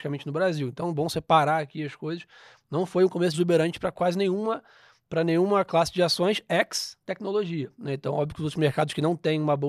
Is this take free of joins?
no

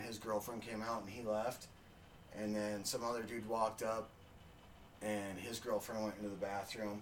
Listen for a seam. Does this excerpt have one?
no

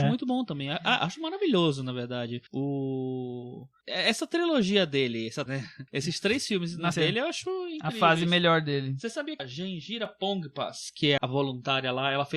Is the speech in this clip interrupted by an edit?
yes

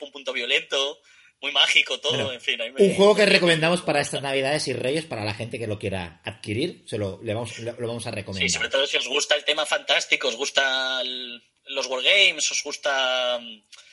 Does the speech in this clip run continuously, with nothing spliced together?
yes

